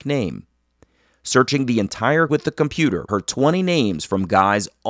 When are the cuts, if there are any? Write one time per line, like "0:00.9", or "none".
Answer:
0:02.3
0:03.1